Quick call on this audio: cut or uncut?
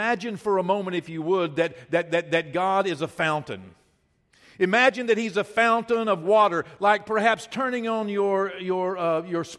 uncut